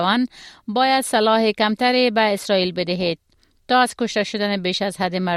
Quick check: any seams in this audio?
no; 0 cuts

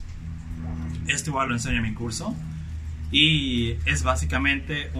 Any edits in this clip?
no; 0 cuts

